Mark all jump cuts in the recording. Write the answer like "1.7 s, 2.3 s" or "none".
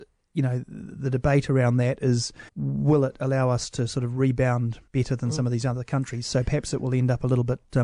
2.5 s, 4.9 s